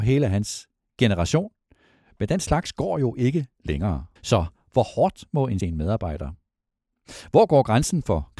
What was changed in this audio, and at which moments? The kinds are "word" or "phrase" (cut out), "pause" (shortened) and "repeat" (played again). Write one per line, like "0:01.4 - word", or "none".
0:04.2 - pause
0:05.6 - phrase